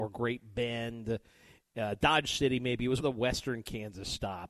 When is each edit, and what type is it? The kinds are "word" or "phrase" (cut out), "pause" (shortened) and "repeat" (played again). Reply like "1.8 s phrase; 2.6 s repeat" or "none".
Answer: 3.0 s word